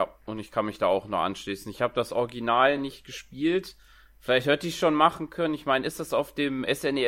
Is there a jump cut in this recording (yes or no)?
no